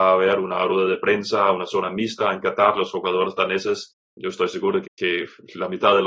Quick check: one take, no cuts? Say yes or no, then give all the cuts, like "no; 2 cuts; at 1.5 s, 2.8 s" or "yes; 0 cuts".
no; 2 cuts; at 4.0 s, 4.8 s